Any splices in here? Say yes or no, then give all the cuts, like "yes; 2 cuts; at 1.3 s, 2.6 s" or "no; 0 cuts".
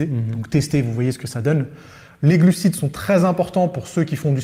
no; 0 cuts